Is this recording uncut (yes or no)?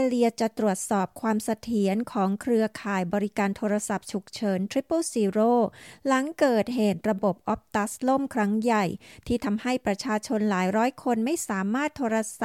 yes